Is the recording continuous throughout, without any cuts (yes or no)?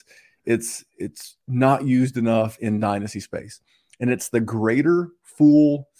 yes